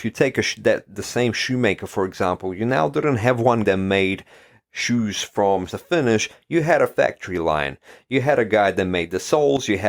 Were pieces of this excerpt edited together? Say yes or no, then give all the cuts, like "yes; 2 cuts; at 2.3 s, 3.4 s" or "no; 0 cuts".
yes; 2 cuts; at 3.6 s, 5.7 s